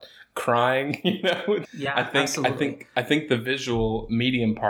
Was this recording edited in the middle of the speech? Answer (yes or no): yes